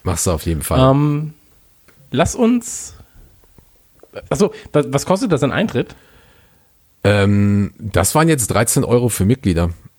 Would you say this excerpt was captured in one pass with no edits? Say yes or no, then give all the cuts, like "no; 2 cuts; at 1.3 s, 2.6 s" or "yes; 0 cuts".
yes; 0 cuts